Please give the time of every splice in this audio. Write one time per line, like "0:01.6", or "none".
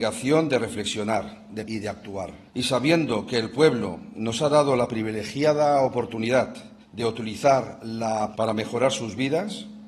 0:01.6
0:02.5
0:06.8
0:08.3